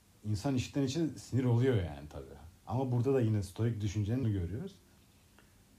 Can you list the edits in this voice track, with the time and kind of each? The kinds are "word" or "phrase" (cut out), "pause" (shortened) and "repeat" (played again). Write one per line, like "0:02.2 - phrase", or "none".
0:02.6 - pause
0:04.2 - word

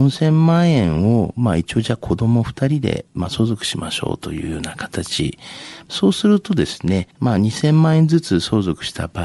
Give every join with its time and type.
0:07.1 - pause

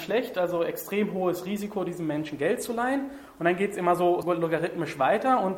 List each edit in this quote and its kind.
0:04.2 - word

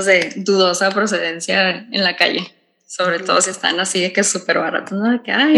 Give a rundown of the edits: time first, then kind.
none

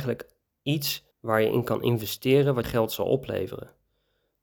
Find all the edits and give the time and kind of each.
0:01.1 - pause
0:02.6 - phrase

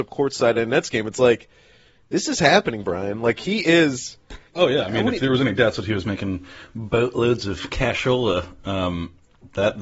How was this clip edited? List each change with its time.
none

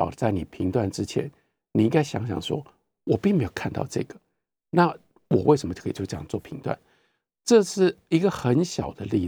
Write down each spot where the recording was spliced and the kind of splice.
none

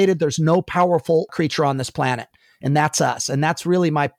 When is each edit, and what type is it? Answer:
none

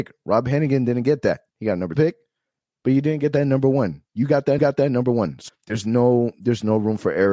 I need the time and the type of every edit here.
0:01.5 - pause
0:02.0 - word
0:04.6 - repeat
0:05.5 - word

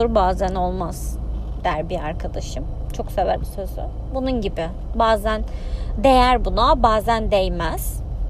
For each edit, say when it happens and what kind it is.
0:03.4 - word

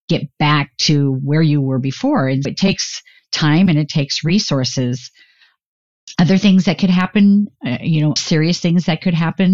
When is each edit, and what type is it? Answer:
0:02.4 - word
0:08.2 - word

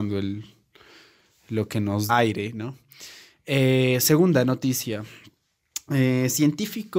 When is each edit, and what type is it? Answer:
0:02.1 - word

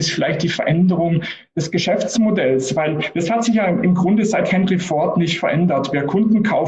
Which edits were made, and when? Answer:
none

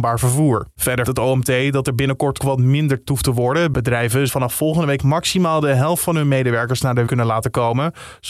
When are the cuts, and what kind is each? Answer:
0:01.0 - word
0:02.4 - word
0:03.1 - word
0:04.3 - word
0:05.0 - word
0:07.1 - word

